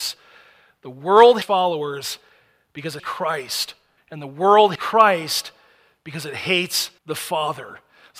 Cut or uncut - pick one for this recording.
cut